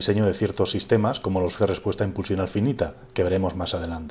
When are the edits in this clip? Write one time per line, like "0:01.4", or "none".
0:01.6